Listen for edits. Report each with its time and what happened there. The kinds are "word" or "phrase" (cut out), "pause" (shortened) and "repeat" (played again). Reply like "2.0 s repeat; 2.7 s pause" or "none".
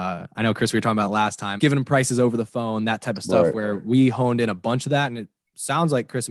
1.6 s word